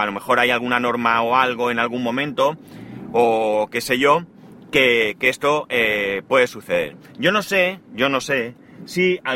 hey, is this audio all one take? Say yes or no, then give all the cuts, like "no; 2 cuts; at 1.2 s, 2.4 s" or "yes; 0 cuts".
yes; 0 cuts